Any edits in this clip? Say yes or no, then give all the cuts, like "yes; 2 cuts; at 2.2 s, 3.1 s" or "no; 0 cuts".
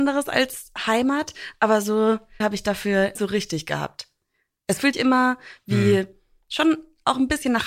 yes; 3 cuts; at 2.4 s, 3.2 s, 4.9 s